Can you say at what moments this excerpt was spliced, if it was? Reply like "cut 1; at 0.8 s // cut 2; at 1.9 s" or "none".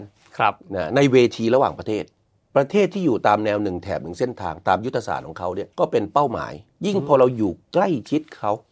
cut 1; at 5.7 s